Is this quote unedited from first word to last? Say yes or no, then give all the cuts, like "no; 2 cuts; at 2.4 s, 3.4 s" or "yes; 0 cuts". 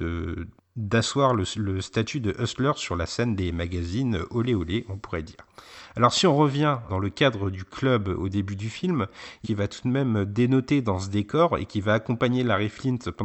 no; 2 cuts; at 6.9 s, 9.4 s